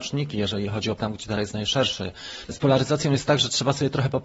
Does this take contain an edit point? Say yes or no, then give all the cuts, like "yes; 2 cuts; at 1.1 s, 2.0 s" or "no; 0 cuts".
yes; 3 cuts; at 1.0 s, 1.4 s, 2.5 s